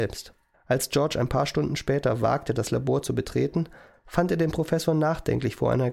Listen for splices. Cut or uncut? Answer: uncut